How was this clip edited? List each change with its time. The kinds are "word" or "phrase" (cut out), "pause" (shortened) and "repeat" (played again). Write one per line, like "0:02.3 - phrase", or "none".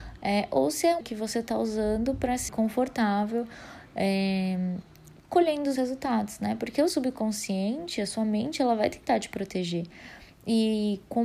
0:01.0 - word
0:02.5 - phrase
0:05.2 - pause
0:05.8 - word
0:06.9 - word